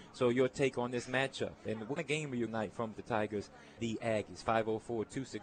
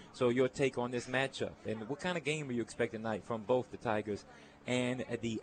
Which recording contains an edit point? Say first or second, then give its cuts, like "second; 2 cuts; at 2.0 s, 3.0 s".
first; 4 cuts; at 2.0 s, 2.5 s, 2.9 s, 3.8 s